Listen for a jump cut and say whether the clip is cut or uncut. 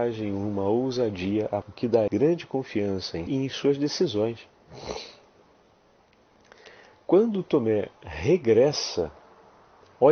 cut